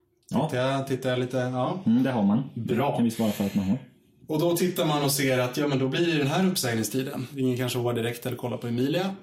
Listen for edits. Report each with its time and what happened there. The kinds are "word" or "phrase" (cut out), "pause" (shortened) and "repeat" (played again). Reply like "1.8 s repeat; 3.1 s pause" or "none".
none